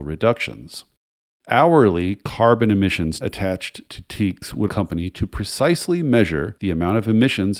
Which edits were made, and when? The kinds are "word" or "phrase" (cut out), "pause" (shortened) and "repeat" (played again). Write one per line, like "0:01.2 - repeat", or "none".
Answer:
0:03.2 - word
0:04.7 - phrase